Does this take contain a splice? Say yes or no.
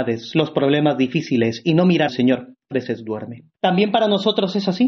yes